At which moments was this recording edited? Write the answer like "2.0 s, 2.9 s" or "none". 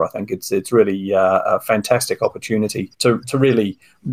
2.9 s